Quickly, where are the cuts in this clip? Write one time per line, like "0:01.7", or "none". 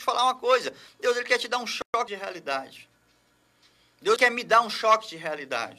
0:04.2